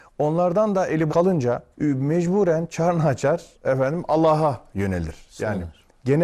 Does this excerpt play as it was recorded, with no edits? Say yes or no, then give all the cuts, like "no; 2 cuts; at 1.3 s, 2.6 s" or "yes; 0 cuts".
no; 3 cuts; at 1.1 s, 1.7 s, 3.5 s